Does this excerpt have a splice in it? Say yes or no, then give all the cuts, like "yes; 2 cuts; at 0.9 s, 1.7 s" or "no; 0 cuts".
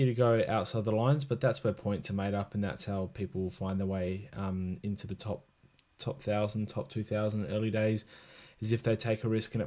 no; 0 cuts